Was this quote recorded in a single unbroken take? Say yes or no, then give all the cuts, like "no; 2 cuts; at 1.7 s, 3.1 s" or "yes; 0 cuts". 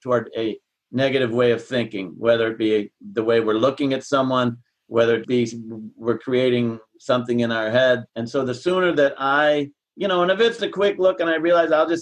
no; 4 cuts; at 5.2 s, 8.1 s, 9.8 s, 10.6 s